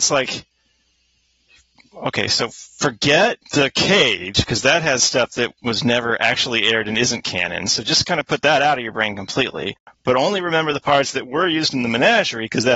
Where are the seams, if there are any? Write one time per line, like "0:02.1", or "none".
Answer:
0:03.4
0:05.6
0:09.8

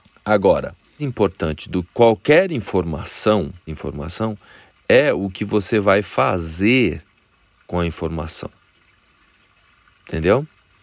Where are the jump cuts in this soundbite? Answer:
0:01.0
0:01.8
0:03.7

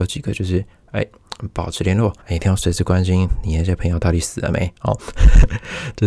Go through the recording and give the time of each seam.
0:02.2

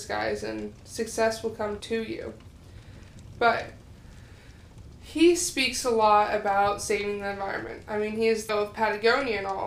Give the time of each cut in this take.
0:01.8
0:08.5

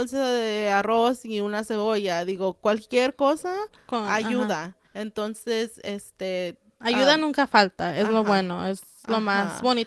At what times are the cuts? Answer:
0:04.8

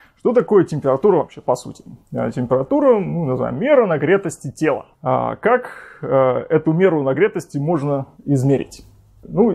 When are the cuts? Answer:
0:02.0
0:04.9
0:08.1

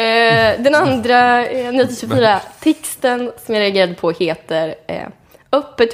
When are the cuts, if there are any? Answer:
none

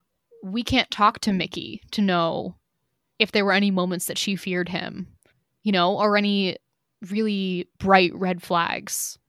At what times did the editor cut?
none

